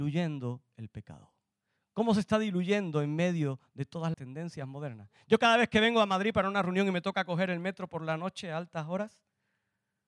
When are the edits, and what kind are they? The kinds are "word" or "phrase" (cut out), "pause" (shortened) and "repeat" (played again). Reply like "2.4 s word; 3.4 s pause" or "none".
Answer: 1.5 s pause; 4.1 s word